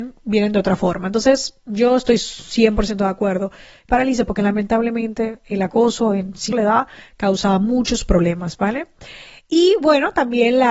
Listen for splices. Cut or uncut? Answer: cut